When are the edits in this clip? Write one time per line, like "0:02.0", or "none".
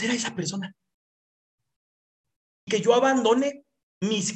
0:02.7